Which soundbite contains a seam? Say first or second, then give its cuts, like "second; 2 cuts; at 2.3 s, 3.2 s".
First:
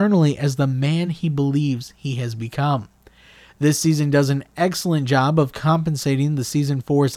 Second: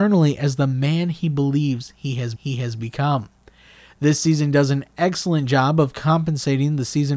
second; 1 cut; at 2.4 s